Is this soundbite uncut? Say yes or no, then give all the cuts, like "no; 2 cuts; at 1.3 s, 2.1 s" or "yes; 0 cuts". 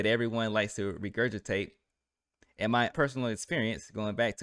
no; 1 cut; at 2.9 s